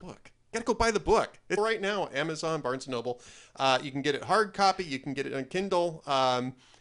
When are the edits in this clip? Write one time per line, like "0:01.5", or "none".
0:01.6